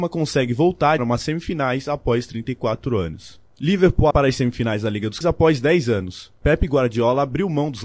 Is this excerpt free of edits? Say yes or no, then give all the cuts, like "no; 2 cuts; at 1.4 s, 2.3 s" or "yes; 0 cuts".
no; 3 cuts; at 1.0 s, 4.1 s, 5.2 s